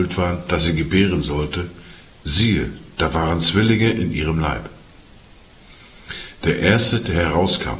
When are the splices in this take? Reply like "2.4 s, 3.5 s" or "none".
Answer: none